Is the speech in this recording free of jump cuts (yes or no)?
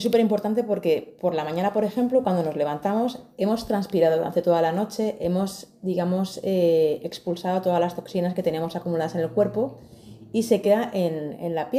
yes